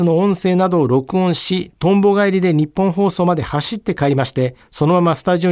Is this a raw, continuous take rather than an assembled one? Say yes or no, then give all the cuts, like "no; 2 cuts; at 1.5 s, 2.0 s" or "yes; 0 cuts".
no; 1 cut; at 4.6 s